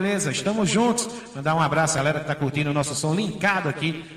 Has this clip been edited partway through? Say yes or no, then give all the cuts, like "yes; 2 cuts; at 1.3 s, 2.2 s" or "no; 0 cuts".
no; 0 cuts